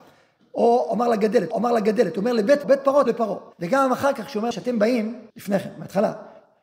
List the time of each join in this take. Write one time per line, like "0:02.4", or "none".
0:01.5
0:02.6
0:03.1
0:03.5
0:04.5
0:05.3